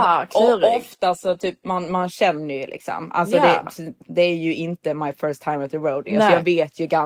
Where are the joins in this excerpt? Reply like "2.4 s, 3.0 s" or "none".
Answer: none